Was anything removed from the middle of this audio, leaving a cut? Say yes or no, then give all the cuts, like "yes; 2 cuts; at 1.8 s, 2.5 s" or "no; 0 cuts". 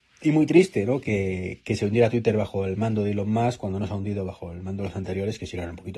no; 0 cuts